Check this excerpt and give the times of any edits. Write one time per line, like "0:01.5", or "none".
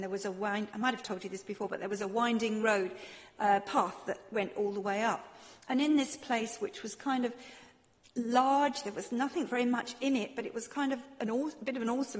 none